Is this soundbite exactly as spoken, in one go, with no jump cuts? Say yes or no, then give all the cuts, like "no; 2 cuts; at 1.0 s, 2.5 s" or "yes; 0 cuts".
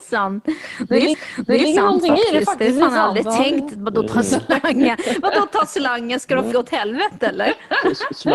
no; 2 cuts; at 1.1 s, 6.5 s